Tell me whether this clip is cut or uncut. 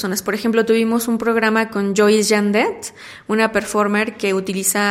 uncut